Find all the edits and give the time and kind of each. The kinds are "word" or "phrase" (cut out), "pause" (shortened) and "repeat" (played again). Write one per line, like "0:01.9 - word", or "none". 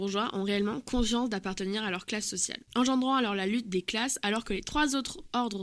0:02.7 - pause